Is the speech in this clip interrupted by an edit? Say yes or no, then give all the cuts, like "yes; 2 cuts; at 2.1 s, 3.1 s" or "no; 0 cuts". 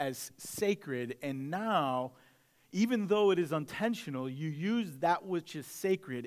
no; 0 cuts